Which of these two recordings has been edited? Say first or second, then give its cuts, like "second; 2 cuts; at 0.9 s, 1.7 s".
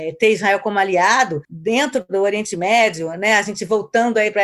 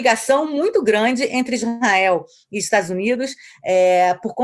first; 1 cut; at 1.4 s